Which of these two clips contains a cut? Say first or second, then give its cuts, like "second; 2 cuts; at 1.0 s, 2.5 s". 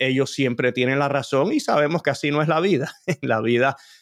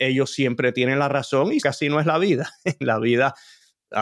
second; 1 cut; at 1.6 s